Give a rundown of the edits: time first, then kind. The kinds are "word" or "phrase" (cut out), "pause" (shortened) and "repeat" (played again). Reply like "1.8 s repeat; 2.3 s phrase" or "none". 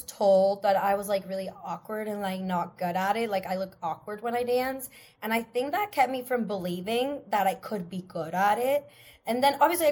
none